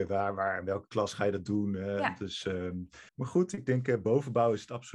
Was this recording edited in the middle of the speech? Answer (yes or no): yes